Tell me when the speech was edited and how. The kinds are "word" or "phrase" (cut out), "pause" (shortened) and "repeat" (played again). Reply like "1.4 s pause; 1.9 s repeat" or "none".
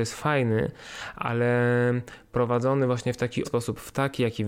3.4 s word